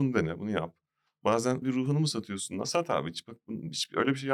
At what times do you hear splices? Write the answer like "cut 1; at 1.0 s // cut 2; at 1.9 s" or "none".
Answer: cut 1; at 1.6 s